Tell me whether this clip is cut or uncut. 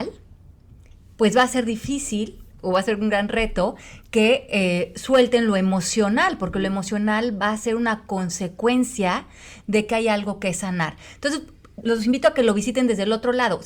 cut